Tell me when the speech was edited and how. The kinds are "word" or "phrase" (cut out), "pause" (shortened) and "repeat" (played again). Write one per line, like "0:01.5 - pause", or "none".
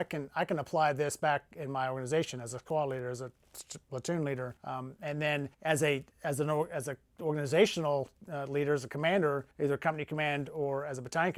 0:04.6 - pause
0:05.5 - pause
0:06.1 - pause
0:09.5 - pause